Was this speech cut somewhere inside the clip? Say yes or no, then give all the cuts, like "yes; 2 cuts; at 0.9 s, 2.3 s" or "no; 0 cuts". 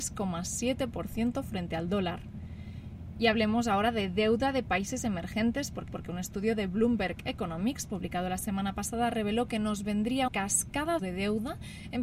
yes; 3 cuts; at 5.9 s, 10.3 s, 11.0 s